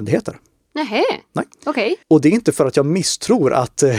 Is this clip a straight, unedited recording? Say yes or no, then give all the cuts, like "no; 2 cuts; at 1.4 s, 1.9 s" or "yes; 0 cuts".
no; 2 cuts; at 1.5 s, 2.0 s